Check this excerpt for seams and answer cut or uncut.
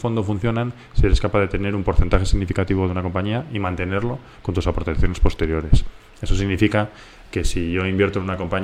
uncut